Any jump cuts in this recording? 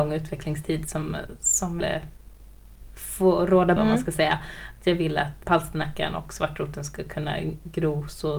yes; 3 cuts; at 1.8 s, 3.8 s, 5.4 s

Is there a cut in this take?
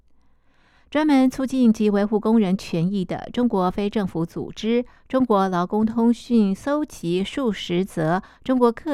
no; 0 cuts

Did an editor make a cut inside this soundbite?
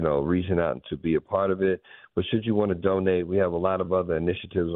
no; 0 cuts

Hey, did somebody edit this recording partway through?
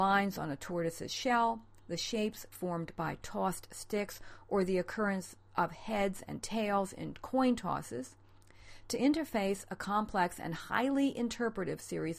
no; 0 cuts

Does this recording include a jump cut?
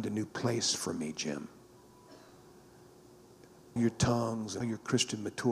yes; 2 cuts; at 3.8 s, 4.6 s

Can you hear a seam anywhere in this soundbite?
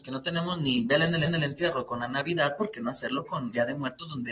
yes; 1 cut; at 1.3 s

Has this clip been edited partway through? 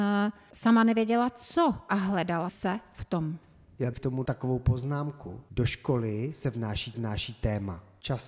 yes; 4 cuts; at 2.5 s, 3.9 s, 4.2 s, 6.9 s

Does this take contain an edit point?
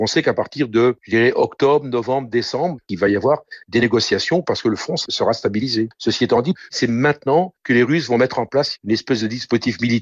no; 0 cuts

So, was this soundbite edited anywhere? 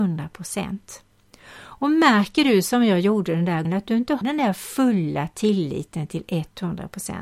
yes; 2 cuts; at 3.6 s, 4.2 s

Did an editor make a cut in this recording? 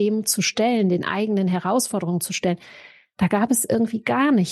no; 0 cuts

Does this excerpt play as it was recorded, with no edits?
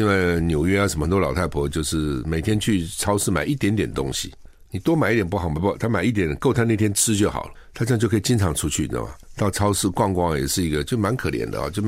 yes; 0 cuts

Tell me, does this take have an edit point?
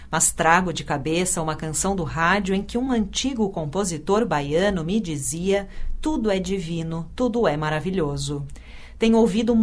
no; 0 cuts

